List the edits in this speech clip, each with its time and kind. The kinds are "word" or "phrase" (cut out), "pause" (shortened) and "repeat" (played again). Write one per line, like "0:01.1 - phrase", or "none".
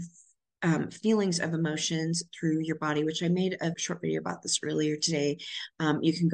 0:03.7 - word